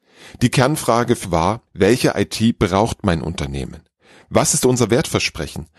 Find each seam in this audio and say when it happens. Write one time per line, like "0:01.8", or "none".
0:01.2
0:01.7